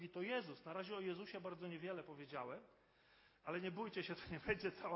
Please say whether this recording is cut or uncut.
uncut